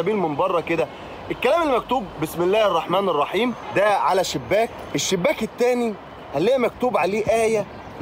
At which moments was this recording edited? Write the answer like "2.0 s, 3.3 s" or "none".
none